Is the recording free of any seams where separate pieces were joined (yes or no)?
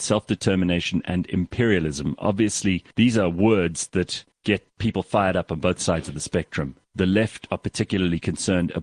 no